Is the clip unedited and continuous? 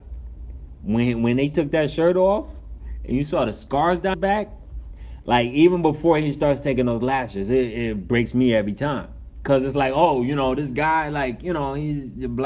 no; 1 cut; at 4.1 s

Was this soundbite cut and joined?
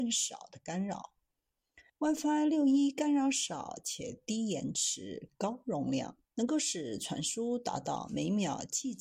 yes; 2 cuts; at 1.9 s, 6.3 s

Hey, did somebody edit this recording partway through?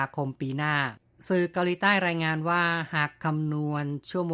no; 0 cuts

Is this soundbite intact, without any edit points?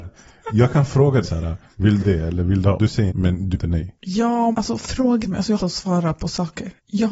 no; 8 cuts; at 1.2 s, 2.0 s, 2.8 s, 3.1 s, 3.5 s, 4.5 s, 5.2 s, 5.6 s

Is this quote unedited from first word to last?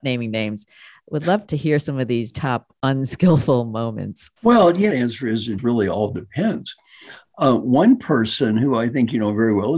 no; 5 cuts; at 1.5 s, 2.3 s, 4.4 s, 4.9 s, 5.6 s

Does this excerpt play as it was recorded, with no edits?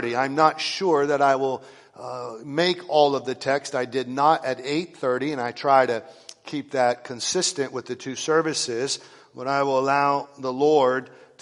yes; 0 cuts

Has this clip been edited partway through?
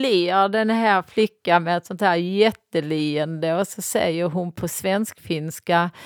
no; 0 cuts

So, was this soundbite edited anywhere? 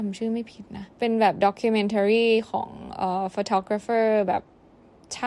yes; 1 cut; at 0.9 s

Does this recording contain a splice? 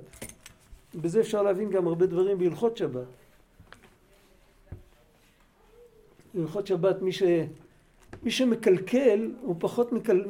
no; 0 cuts

